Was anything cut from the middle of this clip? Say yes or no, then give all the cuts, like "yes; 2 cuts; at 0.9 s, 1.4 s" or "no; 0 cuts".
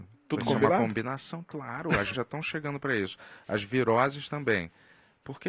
yes; 1 cut; at 2.1 s